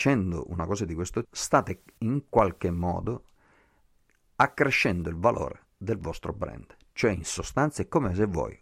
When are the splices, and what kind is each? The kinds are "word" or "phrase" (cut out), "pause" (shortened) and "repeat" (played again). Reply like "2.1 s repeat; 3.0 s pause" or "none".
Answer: 1.2 s word